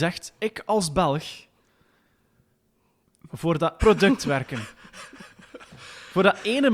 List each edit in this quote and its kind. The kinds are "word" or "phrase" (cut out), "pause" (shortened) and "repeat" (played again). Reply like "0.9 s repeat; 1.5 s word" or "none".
3.3 s word; 3.8 s word

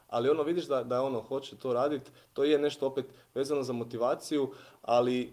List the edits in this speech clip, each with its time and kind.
none

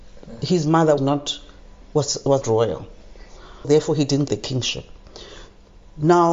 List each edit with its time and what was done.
1.0 s word; 2.4 s word; 3.6 s word; 4.3 s word

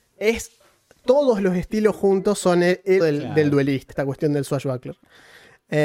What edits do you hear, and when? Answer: 3.0 s word; 3.9 s word

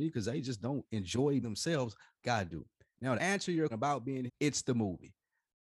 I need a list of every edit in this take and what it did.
1.4 s word; 2.2 s word; 3.2 s word; 3.7 s word; 4.3 s word

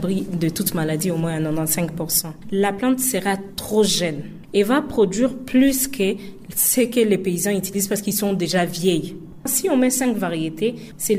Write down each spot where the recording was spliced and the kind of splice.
none

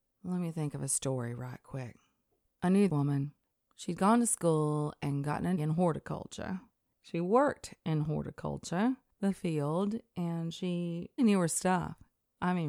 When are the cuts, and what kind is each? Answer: 2.9 s word; 5.6 s word; 11.2 s word

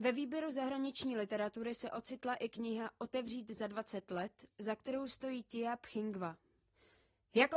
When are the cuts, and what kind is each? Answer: none

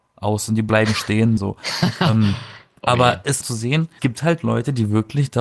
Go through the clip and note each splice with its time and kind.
1.4 s phrase; 3.4 s phrase; 4.0 s word

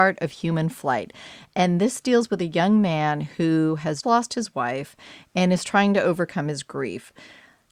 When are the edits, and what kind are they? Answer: 4.0 s word

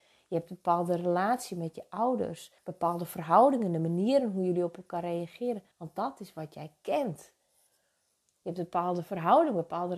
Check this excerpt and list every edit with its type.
2.6 s pause; 5.7 s pause

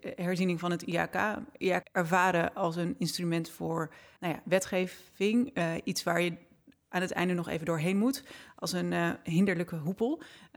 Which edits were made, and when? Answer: 1.8 s word; 4.2 s word

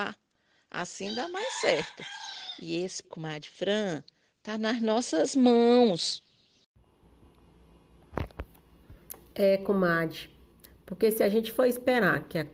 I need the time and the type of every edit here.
3.0 s word

